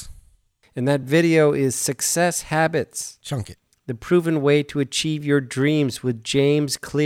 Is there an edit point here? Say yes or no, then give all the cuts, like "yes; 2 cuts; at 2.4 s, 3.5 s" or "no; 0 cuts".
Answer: no; 0 cuts